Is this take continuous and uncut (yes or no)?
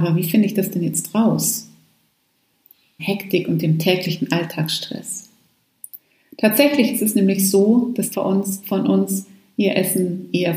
no